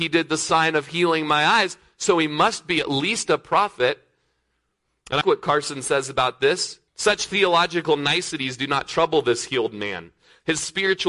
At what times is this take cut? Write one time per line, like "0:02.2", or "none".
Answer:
0:05.2
0:06.9